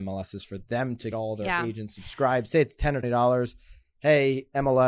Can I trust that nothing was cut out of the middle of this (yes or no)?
no